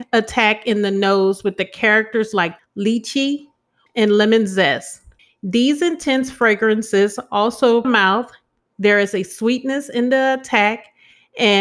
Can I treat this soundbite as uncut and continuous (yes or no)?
no